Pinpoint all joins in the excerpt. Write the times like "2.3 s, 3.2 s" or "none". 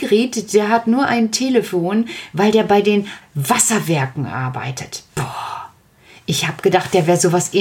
3.2 s